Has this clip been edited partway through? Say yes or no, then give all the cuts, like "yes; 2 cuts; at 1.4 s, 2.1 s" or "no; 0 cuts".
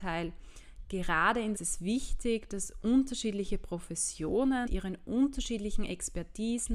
yes; 2 cuts; at 1.5 s, 4.7 s